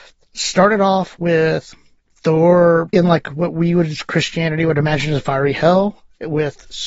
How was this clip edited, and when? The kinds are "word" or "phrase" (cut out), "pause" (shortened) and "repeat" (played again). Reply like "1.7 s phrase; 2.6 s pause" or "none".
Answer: 2.9 s word